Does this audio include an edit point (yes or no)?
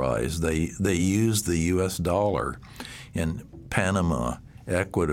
no